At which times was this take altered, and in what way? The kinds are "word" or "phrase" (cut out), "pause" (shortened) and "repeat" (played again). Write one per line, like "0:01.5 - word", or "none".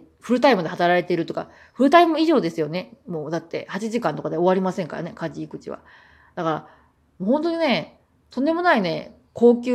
none